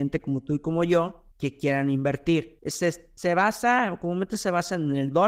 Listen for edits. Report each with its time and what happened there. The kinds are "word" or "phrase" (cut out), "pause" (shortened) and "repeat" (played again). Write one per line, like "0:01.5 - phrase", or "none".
0:01.3 - pause
0:02.6 - pause